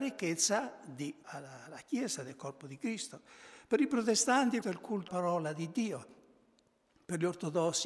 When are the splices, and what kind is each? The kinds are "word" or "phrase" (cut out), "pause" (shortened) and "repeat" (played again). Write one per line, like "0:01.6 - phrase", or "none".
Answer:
0:01.2 - word
0:04.6 - word
0:05.1 - word